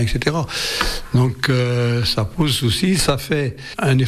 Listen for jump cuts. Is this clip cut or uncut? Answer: uncut